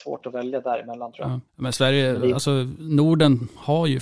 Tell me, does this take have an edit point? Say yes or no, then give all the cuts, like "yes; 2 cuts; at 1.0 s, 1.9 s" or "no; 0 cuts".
yes; 1 cut; at 1.5 s